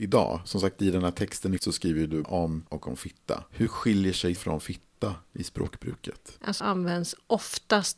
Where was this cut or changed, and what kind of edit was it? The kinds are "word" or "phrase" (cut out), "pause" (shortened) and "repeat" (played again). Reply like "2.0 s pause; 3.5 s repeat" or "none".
1.6 s word; 2.2 s word; 2.7 s word; 4.4 s word; 6.6 s word